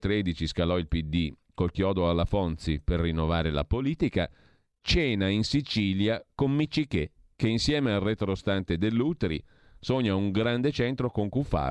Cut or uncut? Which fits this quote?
uncut